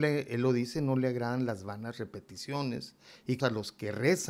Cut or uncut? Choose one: cut